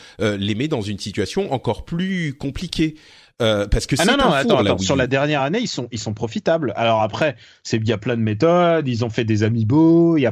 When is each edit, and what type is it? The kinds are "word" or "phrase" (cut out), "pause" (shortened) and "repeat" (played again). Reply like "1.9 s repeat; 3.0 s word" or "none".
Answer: none